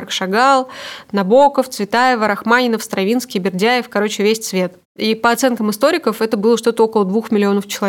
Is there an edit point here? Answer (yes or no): yes